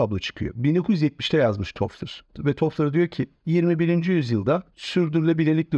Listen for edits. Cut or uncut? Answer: uncut